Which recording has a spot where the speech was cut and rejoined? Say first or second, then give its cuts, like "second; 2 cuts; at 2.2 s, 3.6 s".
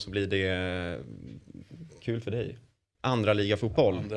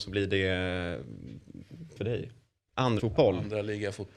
second; 2 cuts; at 2.0 s, 3.0 s